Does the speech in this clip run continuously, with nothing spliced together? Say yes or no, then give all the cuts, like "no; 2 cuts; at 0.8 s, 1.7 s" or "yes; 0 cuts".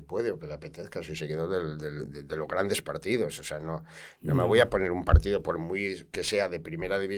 yes; 0 cuts